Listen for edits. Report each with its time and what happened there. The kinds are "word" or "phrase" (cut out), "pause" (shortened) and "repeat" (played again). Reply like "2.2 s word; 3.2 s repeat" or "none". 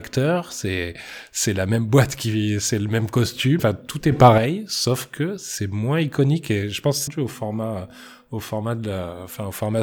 3.6 s word; 7.1 s word